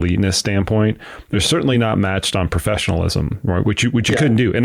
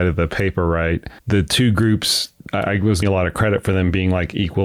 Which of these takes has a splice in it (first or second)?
second